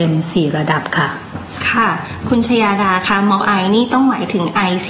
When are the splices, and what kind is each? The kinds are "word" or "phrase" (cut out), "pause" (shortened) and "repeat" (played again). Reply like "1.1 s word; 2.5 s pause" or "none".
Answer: 3.4 s word